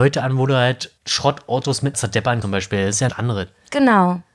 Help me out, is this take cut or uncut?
cut